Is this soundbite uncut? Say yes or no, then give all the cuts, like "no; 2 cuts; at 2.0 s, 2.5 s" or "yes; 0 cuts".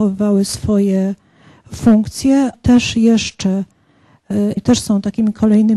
no; 2 cuts; at 2.5 s, 4.6 s